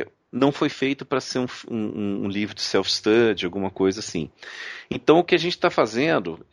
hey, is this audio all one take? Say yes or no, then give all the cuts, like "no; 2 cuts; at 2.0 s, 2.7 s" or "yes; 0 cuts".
yes; 0 cuts